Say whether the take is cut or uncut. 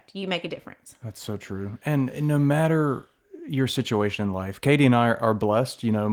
uncut